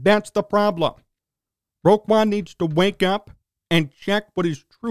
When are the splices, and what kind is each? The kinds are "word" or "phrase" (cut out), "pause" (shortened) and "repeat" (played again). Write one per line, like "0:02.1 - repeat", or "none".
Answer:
none

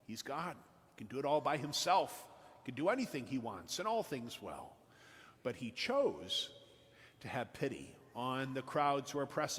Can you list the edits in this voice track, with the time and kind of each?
none

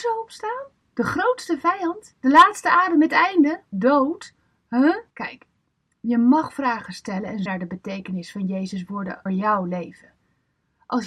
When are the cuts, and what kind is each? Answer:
0:03.7 - phrase
0:05.1 - pause
0:07.5 - word
0:09.3 - word

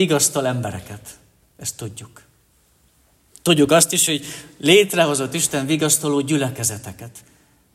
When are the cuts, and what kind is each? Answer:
none

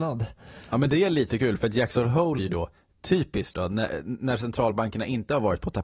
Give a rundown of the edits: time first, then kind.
0:02.4 - word
0:03.5 - word

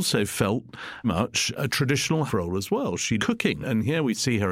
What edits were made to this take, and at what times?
0:01.0 - word
0:02.3 - word
0:03.2 - word

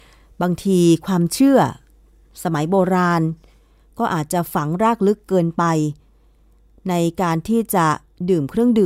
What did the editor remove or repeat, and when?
none

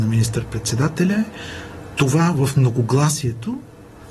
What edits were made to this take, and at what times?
none

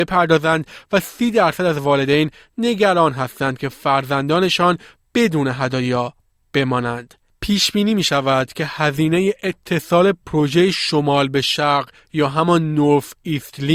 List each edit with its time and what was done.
none

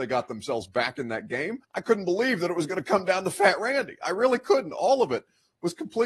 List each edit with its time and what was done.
0:01.6 - pause

